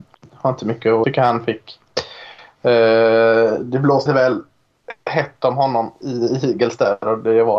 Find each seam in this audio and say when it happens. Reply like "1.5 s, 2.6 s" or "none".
1.0 s, 4.1 s, 6.0 s